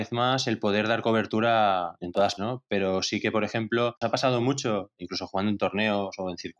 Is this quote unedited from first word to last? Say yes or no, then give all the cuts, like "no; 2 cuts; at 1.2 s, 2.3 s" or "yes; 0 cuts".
no; 3 cuts; at 2.0 s, 2.4 s, 4.0 s